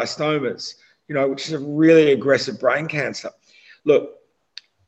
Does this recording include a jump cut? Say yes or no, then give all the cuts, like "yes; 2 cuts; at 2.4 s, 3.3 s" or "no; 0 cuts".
no; 0 cuts